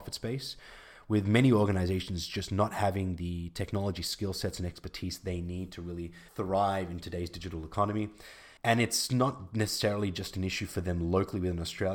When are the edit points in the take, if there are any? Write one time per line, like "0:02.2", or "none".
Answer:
0:06.3
0:08.6